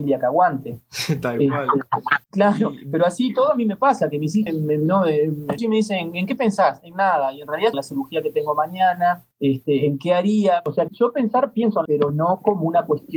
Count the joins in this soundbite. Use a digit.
7